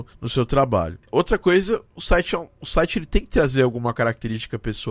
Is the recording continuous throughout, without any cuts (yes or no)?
yes